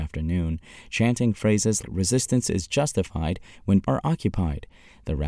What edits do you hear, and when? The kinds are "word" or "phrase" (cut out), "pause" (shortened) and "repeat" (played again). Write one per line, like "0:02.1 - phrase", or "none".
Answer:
0:01.8 - word
0:03.8 - word